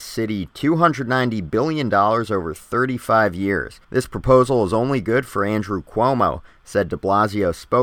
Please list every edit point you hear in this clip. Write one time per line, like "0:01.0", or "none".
0:03.8